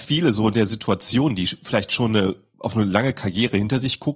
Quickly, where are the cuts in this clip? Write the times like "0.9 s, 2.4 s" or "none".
none

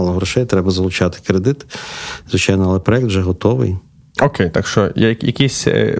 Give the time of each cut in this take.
none

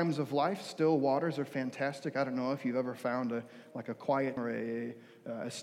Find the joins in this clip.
4.4 s

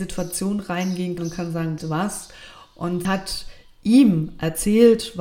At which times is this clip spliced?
1.2 s, 1.8 s, 3.0 s

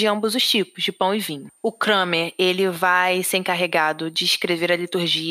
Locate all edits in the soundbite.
1.6 s

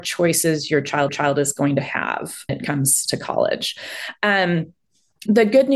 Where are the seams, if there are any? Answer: 1.1 s, 2.5 s

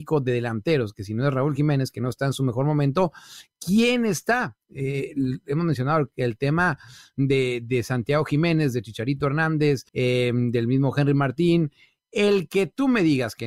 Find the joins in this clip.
9.9 s

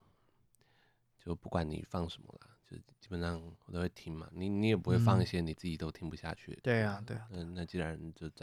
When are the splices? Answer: 3.6 s

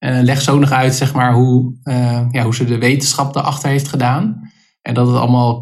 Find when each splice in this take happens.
none

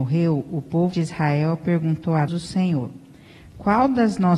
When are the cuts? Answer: 0.9 s, 2.3 s

